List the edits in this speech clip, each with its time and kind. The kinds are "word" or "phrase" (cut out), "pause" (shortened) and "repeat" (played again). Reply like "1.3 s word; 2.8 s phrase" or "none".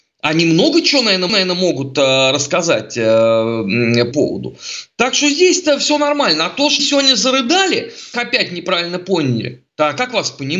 1.3 s repeat; 4.1 s word; 6.8 s word; 8.1 s phrase; 9.7 s pause